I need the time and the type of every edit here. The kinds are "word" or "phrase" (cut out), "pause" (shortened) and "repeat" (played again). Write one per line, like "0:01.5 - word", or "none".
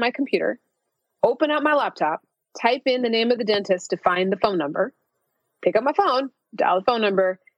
0:02.3 - pause